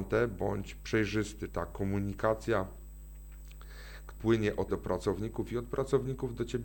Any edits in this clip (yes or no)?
yes